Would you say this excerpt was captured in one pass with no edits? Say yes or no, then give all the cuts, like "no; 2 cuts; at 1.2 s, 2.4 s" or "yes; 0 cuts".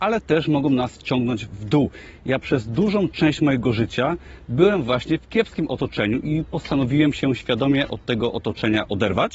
yes; 0 cuts